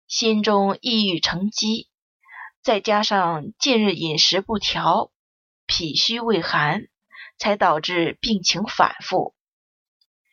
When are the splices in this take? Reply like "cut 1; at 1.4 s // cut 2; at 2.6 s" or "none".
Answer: none